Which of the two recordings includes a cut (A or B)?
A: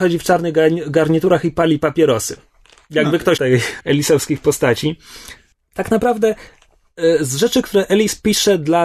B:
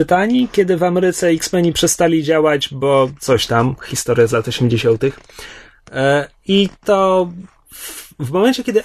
A